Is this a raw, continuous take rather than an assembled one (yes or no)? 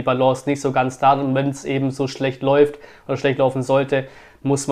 yes